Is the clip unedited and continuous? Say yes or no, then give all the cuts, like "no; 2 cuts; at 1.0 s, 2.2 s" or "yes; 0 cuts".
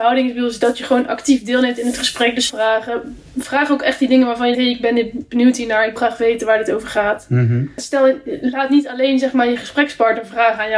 no; 3 cuts; at 2.5 s, 4.5 s, 6.0 s